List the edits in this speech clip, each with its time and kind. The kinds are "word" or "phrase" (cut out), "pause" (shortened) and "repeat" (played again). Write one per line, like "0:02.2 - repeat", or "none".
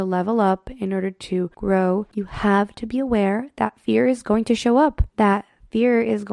0:05.1 - pause